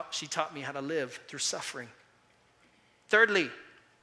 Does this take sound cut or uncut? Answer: uncut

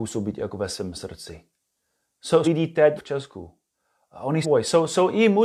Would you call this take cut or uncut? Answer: cut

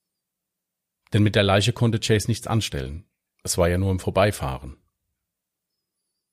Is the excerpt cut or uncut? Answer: uncut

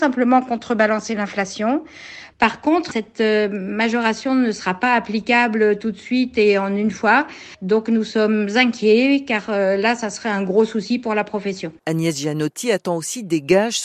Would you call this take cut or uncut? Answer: uncut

